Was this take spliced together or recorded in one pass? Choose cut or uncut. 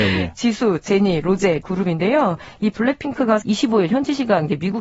cut